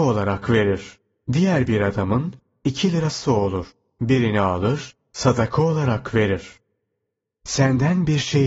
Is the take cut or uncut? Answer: uncut